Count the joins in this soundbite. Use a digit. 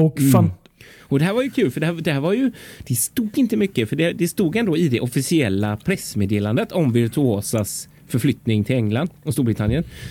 0